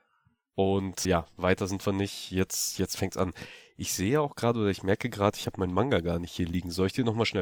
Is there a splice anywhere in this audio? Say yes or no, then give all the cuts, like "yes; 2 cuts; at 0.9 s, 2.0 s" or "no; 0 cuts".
yes; 1 cut; at 1.0 s